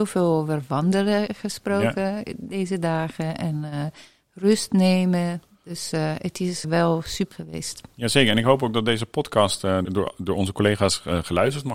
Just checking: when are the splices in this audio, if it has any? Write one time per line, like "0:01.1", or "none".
0:06.6
0:07.3
0:09.8